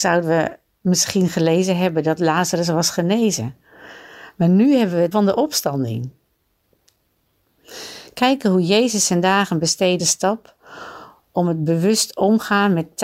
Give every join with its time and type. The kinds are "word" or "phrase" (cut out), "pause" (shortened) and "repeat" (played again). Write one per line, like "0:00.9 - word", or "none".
0:05.1 - word
0:10.0 - phrase